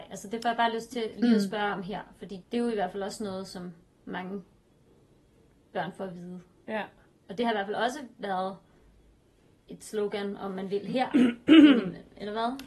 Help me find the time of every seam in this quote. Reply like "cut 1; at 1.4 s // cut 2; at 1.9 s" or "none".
cut 1; at 2.4 s